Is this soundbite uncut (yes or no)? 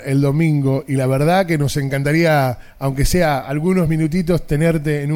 yes